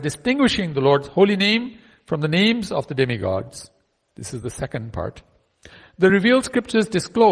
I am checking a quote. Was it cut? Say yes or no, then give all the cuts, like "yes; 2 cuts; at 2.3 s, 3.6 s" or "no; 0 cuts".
no; 0 cuts